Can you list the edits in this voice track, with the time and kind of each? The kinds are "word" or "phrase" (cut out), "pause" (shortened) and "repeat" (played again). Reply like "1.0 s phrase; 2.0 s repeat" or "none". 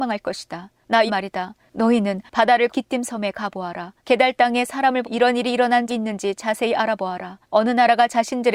1.1 s word; 2.7 s word; 4.0 s pause; 5.0 s word; 5.9 s word; 7.4 s pause